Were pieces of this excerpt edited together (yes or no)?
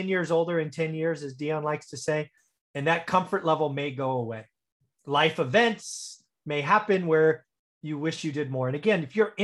no